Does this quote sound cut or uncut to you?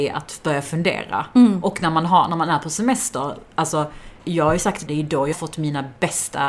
cut